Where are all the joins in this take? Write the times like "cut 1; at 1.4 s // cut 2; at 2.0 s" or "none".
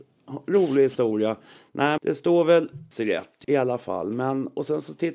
cut 1; at 2.0 s // cut 2; at 2.9 s // cut 3; at 3.4 s